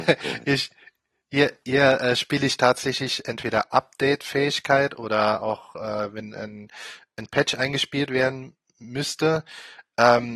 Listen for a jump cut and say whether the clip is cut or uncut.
uncut